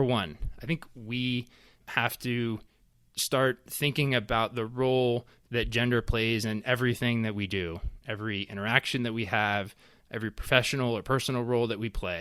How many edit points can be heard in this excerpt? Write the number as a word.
zero